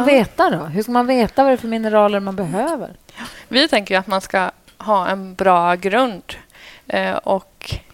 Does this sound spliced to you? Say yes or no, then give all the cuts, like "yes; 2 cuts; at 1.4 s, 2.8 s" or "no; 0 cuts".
no; 0 cuts